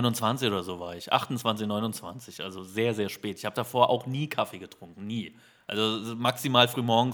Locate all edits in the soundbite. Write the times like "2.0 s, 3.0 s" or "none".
none